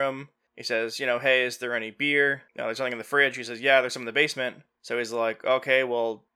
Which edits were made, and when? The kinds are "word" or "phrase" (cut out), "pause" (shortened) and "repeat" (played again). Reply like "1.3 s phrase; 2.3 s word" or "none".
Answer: 2.5 s pause